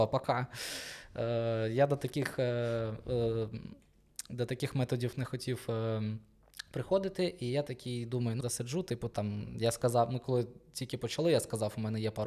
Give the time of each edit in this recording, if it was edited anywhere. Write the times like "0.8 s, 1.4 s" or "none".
8.4 s